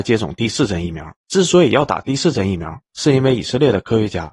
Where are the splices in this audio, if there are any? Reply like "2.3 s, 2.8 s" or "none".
1.2 s, 2.9 s